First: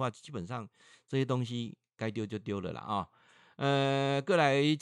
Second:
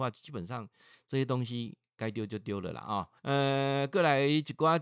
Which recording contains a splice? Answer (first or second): second